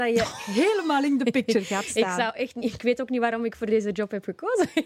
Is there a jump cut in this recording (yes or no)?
no